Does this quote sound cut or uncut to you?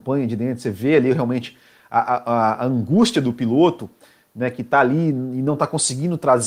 uncut